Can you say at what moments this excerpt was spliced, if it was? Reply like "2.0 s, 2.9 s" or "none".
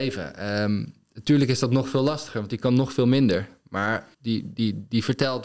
4.1 s